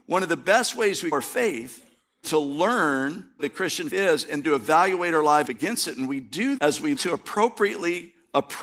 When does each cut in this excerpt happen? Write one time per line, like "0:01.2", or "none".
0:01.1
0:02.2
0:03.4
0:03.9
0:04.4
0:05.4
0:06.6
0:07.0